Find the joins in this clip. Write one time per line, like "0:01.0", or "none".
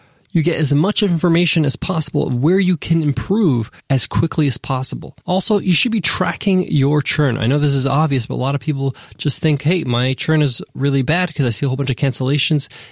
0:03.8
0:05.2

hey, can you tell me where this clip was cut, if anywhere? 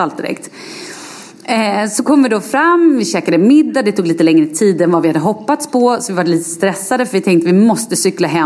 none

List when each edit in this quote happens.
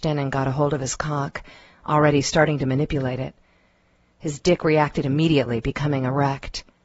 none

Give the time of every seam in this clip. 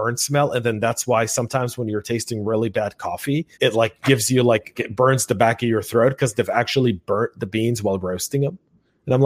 0:03.5
0:04.8

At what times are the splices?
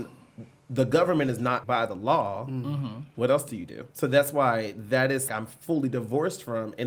0:01.6
0:03.9
0:05.3

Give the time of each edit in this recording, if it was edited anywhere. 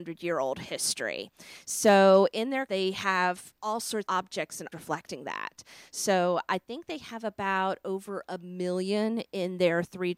0:02.7
0:03.6
0:04.1
0:04.7

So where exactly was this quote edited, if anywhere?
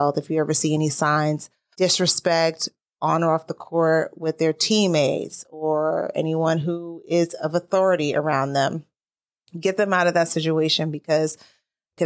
0:01.7

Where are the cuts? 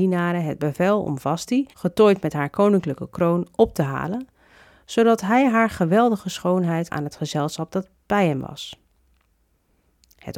0:01.7
0:06.9

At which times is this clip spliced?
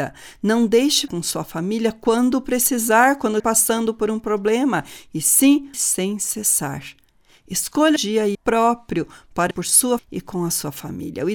0:01.1
0:03.4
0:05.7
0:08.0
0:08.3
0:09.5
0:10.0

